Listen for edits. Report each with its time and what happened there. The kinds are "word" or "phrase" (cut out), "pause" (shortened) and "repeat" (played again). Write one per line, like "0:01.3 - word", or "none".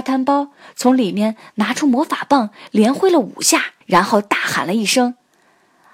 0:03.8 - pause

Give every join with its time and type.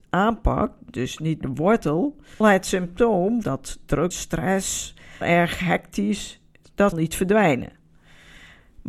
0:01.4 - word
0:02.4 - word
0:03.4 - word
0:04.1 - word
0:05.2 - word
0:06.9 - word

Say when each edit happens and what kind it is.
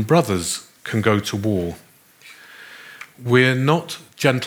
none

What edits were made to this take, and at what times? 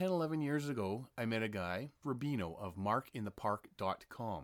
0:02.0 - word

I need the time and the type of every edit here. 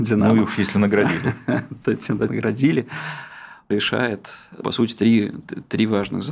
0:02.3 - word
0:03.7 - word
0:04.6 - word

